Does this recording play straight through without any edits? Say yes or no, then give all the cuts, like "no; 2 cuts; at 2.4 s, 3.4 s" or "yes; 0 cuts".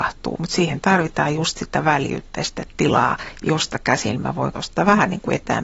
no; 1 cut; at 4.5 s